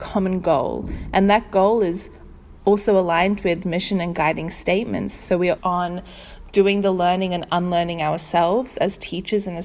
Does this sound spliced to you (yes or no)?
yes